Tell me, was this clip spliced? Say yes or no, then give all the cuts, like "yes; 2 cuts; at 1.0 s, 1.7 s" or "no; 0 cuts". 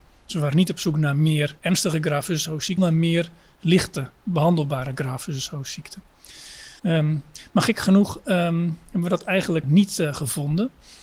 yes; 4 cuts; at 1.6 s, 2.8 s, 6.8 s, 9.6 s